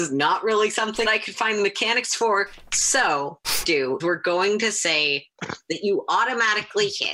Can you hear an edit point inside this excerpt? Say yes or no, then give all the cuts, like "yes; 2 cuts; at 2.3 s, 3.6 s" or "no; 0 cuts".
yes; 3 cuts; at 1.0 s, 3.6 s, 4.0 s